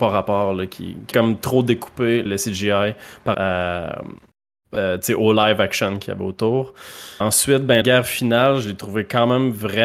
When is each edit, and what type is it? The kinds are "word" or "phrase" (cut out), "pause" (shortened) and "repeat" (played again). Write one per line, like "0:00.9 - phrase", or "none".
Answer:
0:01.1 - word
0:02.3 - word
0:03.3 - word
0:07.2 - word
0:07.8 - word